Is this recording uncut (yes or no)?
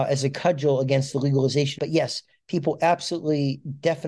no